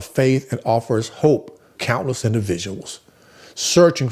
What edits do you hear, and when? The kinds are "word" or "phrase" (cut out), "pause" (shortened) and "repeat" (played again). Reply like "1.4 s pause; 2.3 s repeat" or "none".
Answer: 1.7 s word